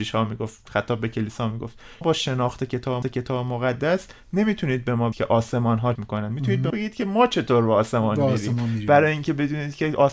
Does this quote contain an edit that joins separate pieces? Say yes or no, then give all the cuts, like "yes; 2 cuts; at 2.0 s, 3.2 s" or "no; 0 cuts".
yes; 5 cuts; at 2.0 s, 3.0 s, 5.1 s, 6.0 s, 6.7 s